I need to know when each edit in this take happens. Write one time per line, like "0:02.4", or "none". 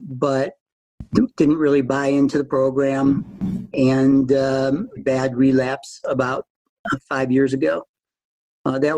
0:05.0